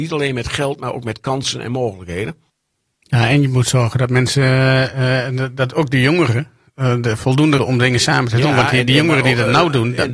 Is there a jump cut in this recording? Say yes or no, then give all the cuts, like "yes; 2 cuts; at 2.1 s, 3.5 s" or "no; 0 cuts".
yes; 1 cut; at 7.6 s